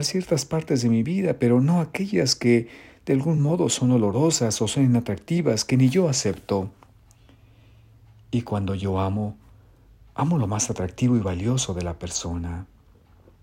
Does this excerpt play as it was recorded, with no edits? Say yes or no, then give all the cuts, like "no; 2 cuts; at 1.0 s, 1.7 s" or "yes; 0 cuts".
yes; 0 cuts